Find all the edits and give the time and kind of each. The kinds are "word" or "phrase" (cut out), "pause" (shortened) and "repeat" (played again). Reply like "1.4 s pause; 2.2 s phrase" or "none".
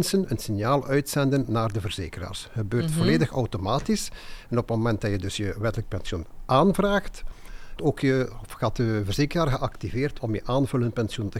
7.8 s word; 10.2 s word